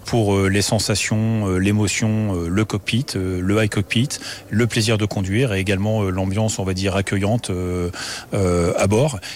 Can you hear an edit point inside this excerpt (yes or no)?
no